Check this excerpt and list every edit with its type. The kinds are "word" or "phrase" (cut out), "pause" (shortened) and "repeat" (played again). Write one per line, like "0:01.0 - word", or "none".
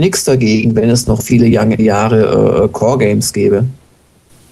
0:01.8 - word